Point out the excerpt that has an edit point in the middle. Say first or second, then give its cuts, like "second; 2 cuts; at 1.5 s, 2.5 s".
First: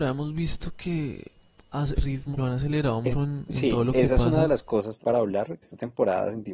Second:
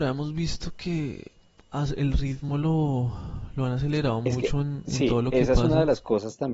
first; 5 cuts; at 2.0 s, 2.3 s, 3.1 s, 5.0 s, 5.6 s